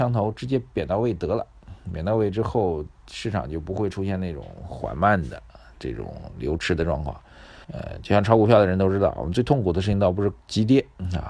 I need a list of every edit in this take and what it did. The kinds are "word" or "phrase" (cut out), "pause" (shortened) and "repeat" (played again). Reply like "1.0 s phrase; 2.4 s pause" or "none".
7.6 s pause